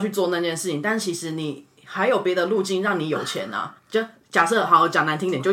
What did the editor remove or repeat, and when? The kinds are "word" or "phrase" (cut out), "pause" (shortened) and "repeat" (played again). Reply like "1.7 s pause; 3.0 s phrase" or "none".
3.8 s pause